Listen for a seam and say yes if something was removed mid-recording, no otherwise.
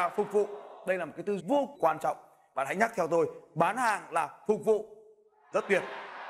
yes